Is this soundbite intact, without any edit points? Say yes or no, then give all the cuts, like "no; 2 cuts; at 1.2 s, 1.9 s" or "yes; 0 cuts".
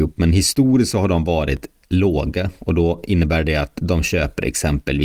yes; 0 cuts